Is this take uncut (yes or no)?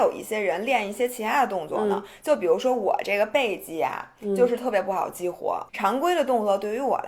no